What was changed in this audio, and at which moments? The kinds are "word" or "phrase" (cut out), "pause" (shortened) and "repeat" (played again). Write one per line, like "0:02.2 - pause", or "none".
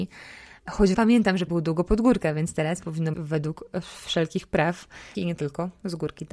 0:00.9 - word
0:01.5 - word
0:03.1 - word
0:05.1 - word